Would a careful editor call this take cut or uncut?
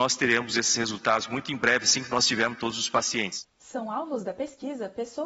uncut